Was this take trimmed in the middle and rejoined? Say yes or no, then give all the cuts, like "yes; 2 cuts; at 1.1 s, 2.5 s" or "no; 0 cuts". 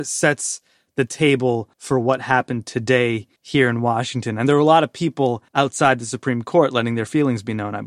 yes; 3 cuts; at 1.7 s, 3.4 s, 5.5 s